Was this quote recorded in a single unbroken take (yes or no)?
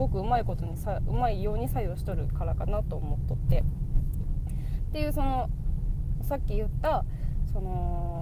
no